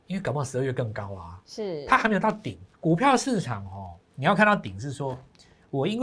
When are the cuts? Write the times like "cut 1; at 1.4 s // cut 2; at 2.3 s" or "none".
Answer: cut 1; at 2.7 s